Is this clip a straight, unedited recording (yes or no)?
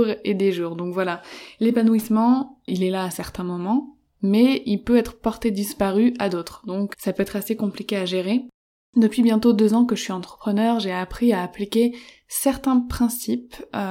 no